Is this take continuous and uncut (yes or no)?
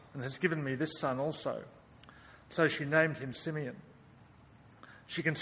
yes